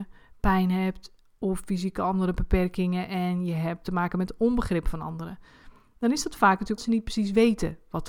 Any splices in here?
yes; 1 cut; at 6.8 s

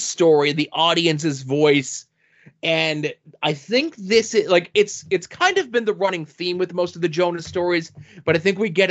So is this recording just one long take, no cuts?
yes; 0 cuts

